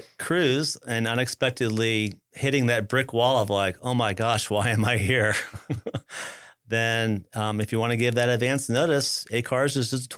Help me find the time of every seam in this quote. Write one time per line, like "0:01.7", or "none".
0:02.2

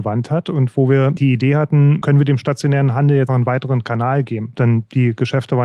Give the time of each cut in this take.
0:01.2
0:02.0
0:03.3

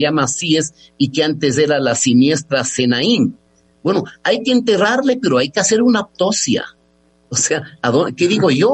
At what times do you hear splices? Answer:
none

